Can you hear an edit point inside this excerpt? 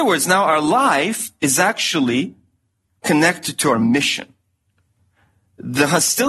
no; 0 cuts

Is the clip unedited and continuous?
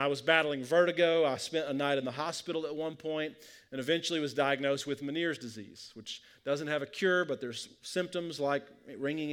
yes; 0 cuts

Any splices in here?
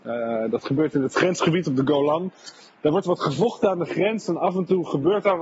no; 0 cuts

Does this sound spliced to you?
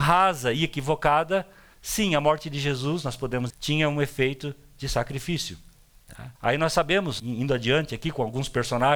yes; 3 cuts; at 3.5 s, 6.4 s, 7.2 s

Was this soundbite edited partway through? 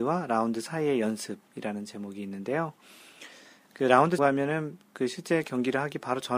yes; 1 cut; at 4.2 s

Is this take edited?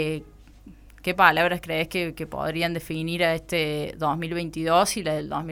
no; 0 cuts

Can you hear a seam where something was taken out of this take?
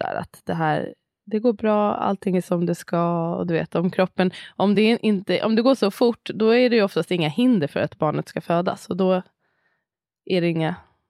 no; 0 cuts

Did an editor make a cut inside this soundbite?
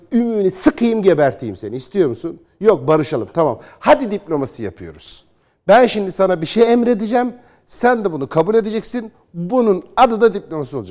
no; 0 cuts

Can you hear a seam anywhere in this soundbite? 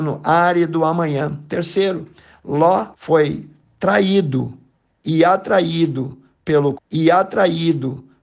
yes; 2 cuts; at 2.9 s, 6.7 s

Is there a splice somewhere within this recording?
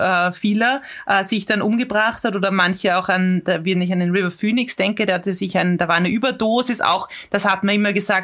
no; 0 cuts

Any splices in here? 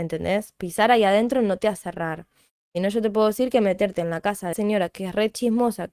yes; 1 cut; at 4.5 s

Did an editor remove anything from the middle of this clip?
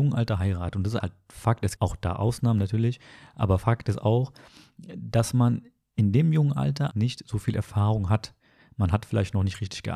yes; 3 cuts; at 1.0 s, 1.8 s, 6.9 s

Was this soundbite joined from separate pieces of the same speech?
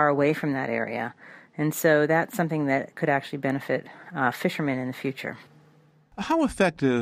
no; 0 cuts

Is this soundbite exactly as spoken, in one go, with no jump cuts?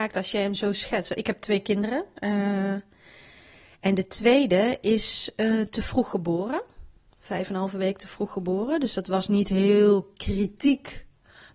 yes; 0 cuts

